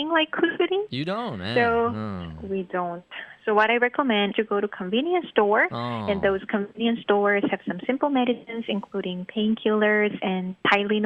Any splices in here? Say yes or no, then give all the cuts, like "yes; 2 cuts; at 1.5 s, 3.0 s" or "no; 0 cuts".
yes; 1 cut; at 4.3 s